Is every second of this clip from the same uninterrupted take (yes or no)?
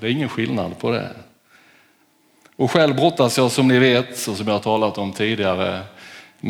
yes